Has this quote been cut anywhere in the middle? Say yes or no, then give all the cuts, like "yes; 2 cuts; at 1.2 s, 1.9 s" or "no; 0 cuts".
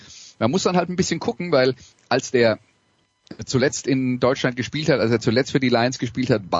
no; 0 cuts